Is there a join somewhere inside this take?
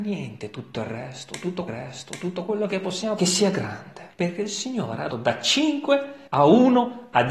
yes; 5 cuts; at 1.7 s, 3.2 s, 4.1 s, 5.1 s, 6.3 s

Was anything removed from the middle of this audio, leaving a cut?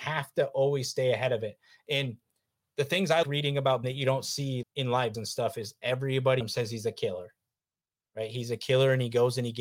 yes; 5 cuts; at 3.2 s, 3.8 s, 4.6 s, 5.1 s, 6.4 s

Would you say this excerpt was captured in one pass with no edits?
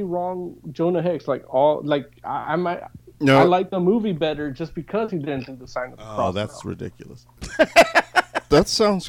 yes; 0 cuts

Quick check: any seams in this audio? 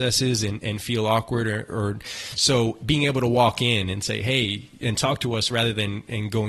no; 0 cuts

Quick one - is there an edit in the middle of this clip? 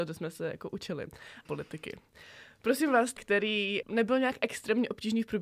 yes; 3 cuts; at 1.4 s, 3.2 s, 3.8 s

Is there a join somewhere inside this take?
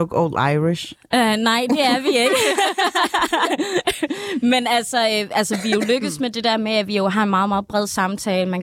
no; 0 cuts

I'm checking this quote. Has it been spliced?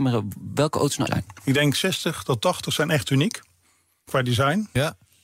yes; 1 cut; at 1.1 s

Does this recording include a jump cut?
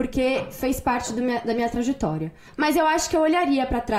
no; 0 cuts

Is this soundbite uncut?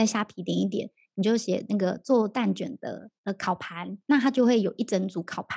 no; 2 cuts; at 3.2 s, 4.0 s

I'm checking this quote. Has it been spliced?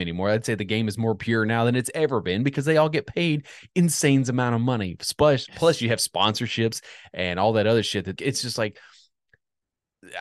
yes; 1 cut; at 8.2 s

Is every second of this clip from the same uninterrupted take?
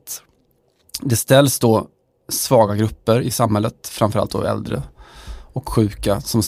yes; 0 cuts

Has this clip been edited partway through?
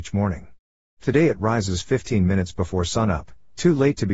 no; 0 cuts

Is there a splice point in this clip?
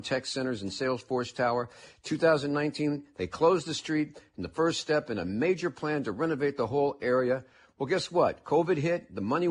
no; 0 cuts

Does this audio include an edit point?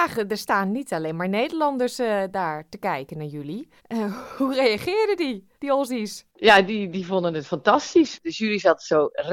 yes; 3 cuts; at 3.8 s, 5.5 s, 6.3 s

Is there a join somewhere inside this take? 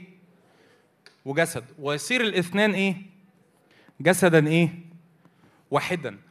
no; 0 cuts

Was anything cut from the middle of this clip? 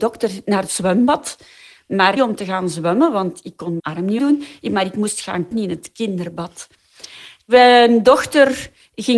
yes; 4 cuts; at 2.2 s, 3.8 s, 4.2 s, 5.5 s

